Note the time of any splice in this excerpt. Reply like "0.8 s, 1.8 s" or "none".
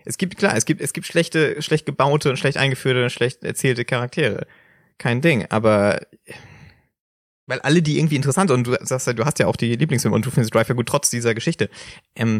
none